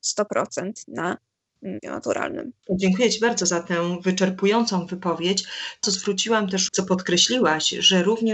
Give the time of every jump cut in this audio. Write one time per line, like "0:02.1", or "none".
0:01.8
0:02.6
0:05.8
0:06.7